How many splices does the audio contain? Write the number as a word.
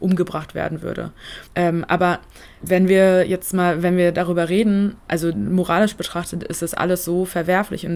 one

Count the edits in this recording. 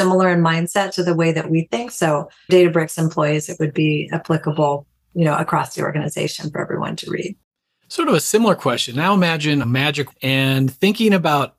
three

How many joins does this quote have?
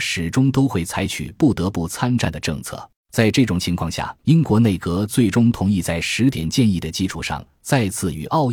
two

